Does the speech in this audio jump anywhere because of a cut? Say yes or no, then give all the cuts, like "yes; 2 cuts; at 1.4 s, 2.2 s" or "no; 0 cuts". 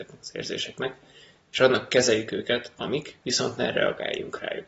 no; 0 cuts